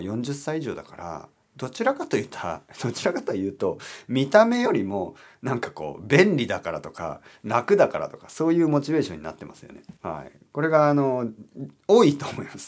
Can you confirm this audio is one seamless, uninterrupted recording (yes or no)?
no